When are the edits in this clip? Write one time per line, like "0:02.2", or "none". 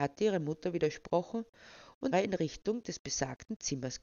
0:02.1